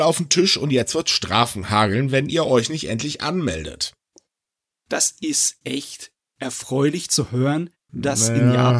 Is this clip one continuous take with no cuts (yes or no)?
yes